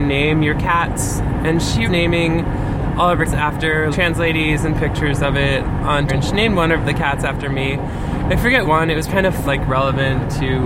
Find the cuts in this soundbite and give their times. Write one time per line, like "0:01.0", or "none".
0:01.8
0:03.3
0:03.9
0:04.7
0:06.1
0:08.6
0:09.1
0:09.4